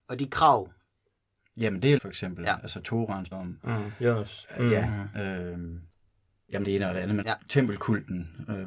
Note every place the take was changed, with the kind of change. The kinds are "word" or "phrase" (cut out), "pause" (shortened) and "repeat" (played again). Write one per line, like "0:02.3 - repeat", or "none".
0:02.0 - word
0:03.3 - word
0:06.6 - word
0:07.2 - word